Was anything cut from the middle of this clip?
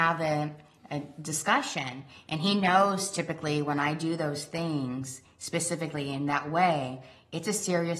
no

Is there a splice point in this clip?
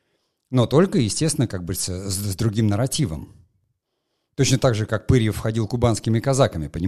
no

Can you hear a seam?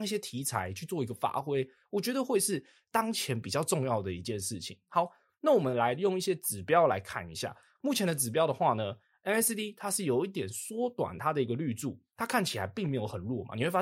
no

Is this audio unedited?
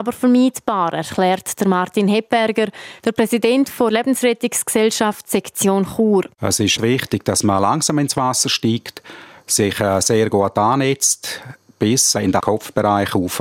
no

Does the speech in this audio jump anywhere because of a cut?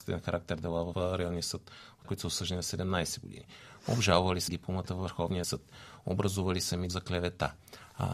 yes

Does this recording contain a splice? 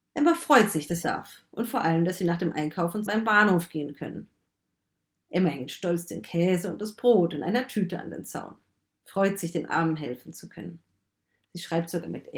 yes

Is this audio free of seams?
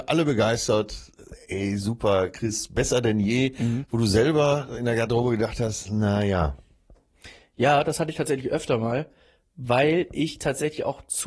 yes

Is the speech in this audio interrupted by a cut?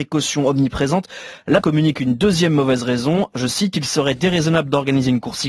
yes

